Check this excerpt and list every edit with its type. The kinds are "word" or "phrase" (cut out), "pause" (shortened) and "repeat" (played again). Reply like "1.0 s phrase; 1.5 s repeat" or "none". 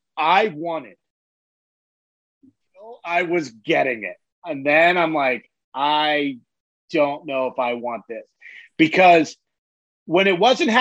none